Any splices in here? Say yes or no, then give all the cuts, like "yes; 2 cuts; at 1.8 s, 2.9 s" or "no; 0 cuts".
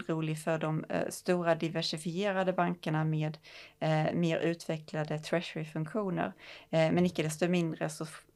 no; 0 cuts